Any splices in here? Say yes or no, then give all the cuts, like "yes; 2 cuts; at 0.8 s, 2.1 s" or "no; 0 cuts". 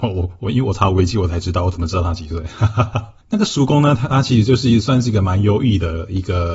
yes; 1 cut; at 3.2 s